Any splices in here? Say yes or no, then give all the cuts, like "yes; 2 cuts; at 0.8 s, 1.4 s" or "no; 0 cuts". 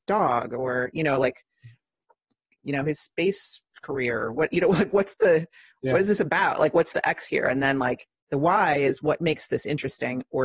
no; 0 cuts